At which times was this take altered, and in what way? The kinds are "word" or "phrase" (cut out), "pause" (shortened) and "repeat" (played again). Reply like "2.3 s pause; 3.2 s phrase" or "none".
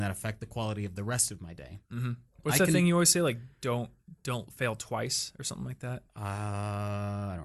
6.1 s pause